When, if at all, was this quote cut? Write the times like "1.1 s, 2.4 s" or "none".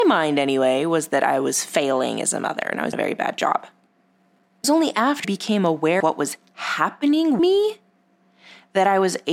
2.9 s, 4.6 s, 5.2 s, 6.0 s, 7.4 s